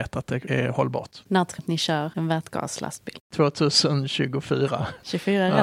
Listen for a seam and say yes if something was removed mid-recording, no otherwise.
yes